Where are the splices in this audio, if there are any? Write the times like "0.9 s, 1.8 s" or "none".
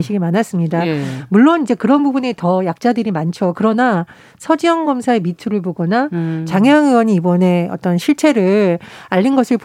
none

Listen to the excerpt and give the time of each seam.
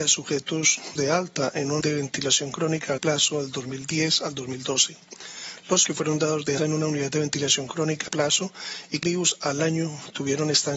1.0 s, 1.8 s, 3.0 s, 5.8 s, 6.6 s, 8.1 s, 9.0 s

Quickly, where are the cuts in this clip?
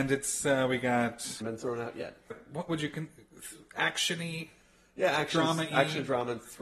1.4 s, 2.3 s, 2.7 s

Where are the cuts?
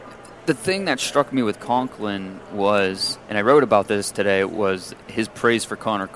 3.2 s

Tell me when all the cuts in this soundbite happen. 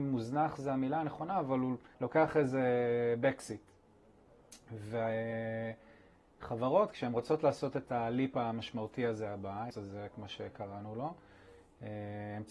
1.9 s, 9.7 s

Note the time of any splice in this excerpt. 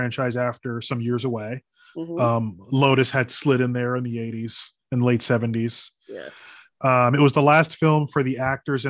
none

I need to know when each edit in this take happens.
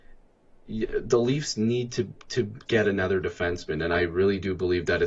none

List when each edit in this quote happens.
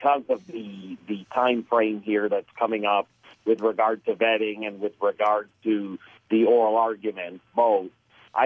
none

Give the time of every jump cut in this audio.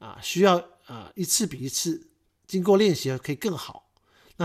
none

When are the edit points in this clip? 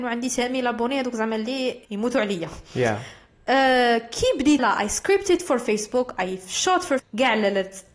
1.8 s, 4.6 s, 7.0 s

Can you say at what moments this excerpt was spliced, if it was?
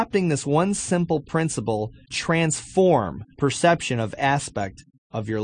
2.1 s, 3.4 s, 4.2 s

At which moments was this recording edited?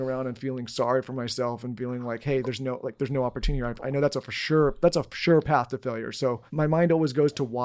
6.5 s

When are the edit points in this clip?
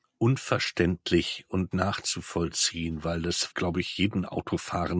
1.7 s, 3.5 s

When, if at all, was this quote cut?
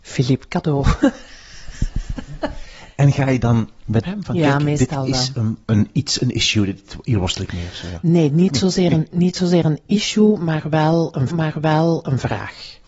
4.0 s, 5.6 s, 11.3 s

